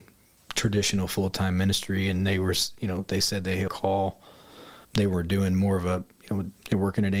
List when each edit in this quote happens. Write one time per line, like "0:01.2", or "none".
0:03.7
0:04.9